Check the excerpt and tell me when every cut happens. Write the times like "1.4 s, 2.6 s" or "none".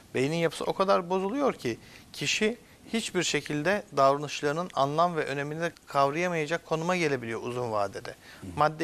5.7 s